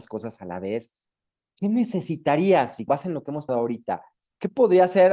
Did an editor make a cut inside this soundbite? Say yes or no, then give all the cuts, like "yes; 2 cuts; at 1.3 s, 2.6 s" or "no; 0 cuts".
yes; 2 cuts; at 2.9 s, 3.5 s